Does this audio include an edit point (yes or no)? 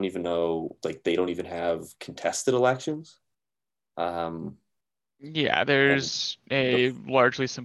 no